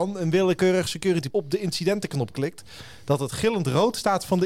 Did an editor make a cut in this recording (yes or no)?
yes